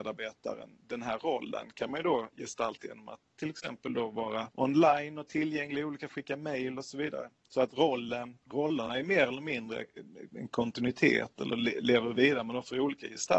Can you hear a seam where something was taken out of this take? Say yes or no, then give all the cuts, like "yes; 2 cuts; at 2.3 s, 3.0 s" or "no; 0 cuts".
yes; 3 cuts; at 4.5 s, 6.1 s, 8.4 s